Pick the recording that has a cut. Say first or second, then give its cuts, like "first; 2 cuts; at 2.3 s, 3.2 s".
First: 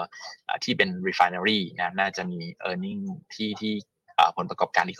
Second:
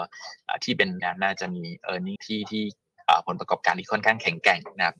second; 2 cuts; at 1.0 s, 2.2 s